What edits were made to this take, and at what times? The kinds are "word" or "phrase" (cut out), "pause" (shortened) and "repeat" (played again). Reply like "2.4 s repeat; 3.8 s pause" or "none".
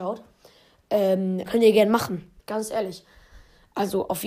1.5 s word; 2.4 s pause